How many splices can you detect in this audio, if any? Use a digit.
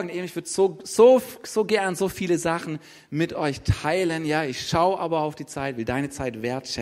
0